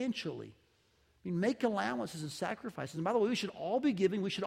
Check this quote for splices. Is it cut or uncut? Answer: uncut